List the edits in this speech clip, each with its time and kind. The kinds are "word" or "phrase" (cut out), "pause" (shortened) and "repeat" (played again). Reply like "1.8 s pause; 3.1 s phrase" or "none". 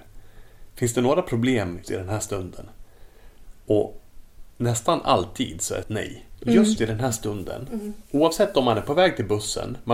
1.8 s word; 5.8 s word